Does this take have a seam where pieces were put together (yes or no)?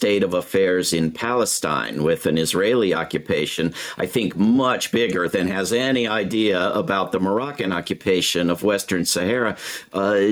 no